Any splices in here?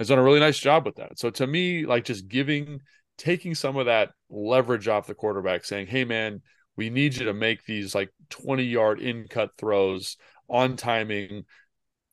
no; 0 cuts

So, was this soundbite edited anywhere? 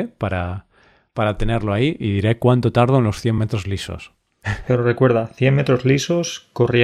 no; 0 cuts

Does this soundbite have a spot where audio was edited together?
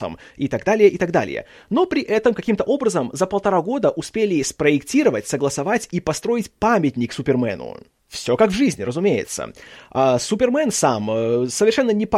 no; 0 cuts

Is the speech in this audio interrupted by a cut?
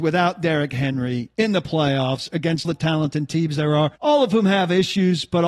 yes; 2 cuts; at 2.6 s, 4.0 s

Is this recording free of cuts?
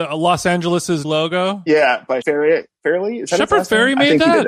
no; 2 cuts; at 1.0 s, 2.2 s

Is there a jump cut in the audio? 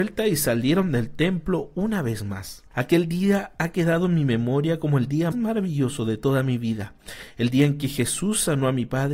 yes; 2 cuts; at 2.7 s, 5.3 s

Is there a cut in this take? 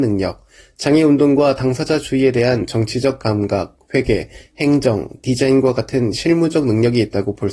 no; 0 cuts

